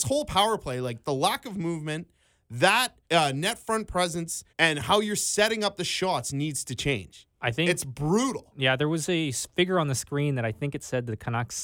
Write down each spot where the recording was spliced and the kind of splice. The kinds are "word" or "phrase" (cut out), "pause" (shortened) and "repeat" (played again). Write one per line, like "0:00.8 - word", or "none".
0:03.0 - pause
0:04.5 - pause
0:07.3 - pause